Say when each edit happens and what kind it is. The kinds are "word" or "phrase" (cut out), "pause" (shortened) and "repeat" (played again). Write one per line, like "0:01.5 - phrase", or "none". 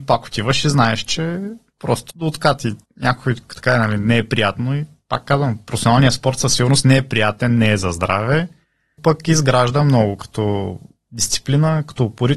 0:02.1 - word
0:02.8 - pause
0:09.0 - word